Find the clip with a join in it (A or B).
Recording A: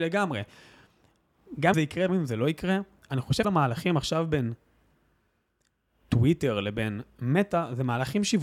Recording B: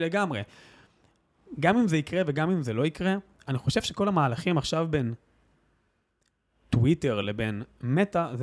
A